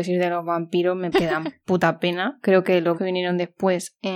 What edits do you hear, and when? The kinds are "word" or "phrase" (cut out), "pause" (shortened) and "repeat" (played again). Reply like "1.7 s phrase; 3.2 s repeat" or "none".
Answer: 1.1 s word; 2.9 s word